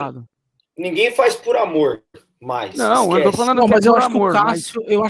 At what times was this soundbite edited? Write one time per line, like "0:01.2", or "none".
none